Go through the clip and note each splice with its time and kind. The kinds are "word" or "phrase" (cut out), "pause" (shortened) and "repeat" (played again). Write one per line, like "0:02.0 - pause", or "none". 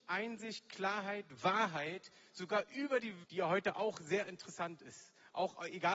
0:03.2 - word